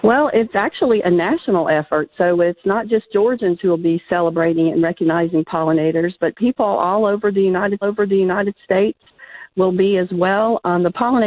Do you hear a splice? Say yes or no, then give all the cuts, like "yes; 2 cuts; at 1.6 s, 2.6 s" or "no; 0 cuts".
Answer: yes; 1 cut; at 7.8 s